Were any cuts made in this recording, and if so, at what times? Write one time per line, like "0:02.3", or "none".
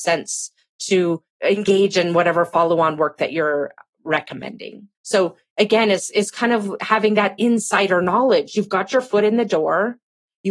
0:04.9